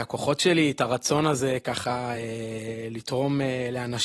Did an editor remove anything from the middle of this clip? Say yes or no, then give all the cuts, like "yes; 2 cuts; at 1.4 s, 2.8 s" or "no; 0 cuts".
no; 0 cuts